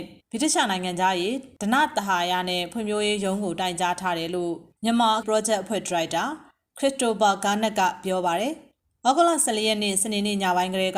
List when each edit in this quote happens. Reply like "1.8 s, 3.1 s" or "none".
5.2 s